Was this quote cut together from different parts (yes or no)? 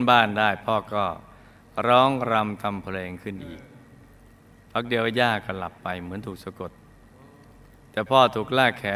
no